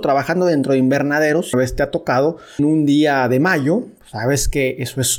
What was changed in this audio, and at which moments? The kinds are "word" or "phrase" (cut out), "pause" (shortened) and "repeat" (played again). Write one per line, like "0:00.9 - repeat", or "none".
0:01.5 - word
0:02.6 - word

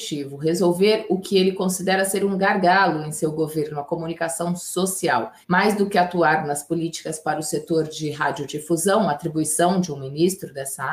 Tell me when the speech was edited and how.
0:05.4 - pause

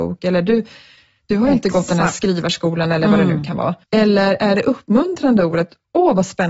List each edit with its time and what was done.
0:03.8 - pause

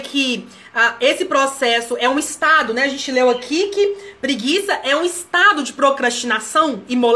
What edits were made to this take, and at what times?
none

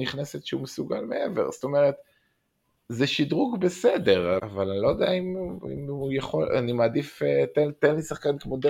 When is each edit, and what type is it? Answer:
0:04.4 - word

